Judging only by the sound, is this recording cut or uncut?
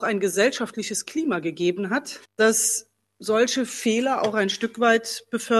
uncut